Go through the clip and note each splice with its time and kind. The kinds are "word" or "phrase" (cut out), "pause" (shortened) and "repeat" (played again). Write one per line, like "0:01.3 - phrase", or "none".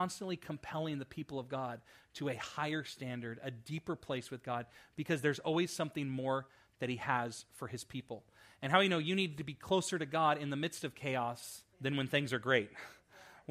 0:11.7 - pause

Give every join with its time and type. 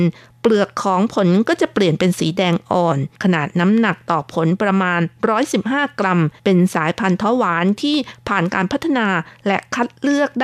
0:03.1 - pause
0:06.4 - pause

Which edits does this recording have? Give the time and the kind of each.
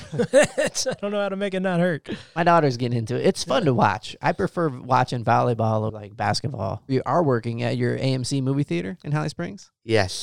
0:05.9 - word

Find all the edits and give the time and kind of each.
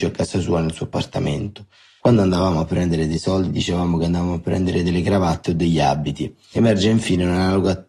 none

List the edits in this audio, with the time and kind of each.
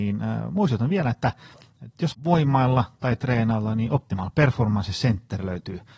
0:02.1 - word

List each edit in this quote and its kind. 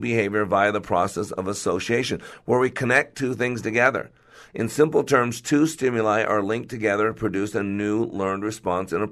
none

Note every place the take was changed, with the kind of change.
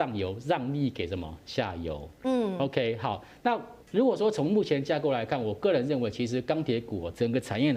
0:03.8 - pause

